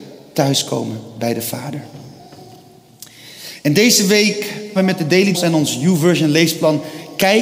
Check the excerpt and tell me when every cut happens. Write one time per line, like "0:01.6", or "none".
0:04.8
0:05.3